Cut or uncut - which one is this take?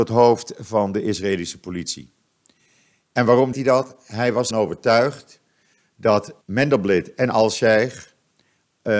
cut